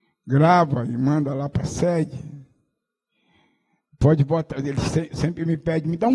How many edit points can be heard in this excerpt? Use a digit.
0